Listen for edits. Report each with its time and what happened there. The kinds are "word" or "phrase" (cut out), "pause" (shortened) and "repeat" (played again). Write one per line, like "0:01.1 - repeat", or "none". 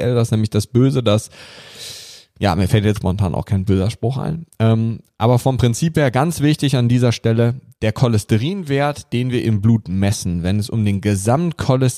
0:03.0 - word